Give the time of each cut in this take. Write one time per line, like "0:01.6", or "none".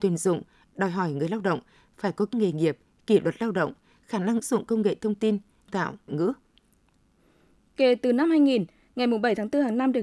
0:02.3
0:04.4
0:05.7
0:06.1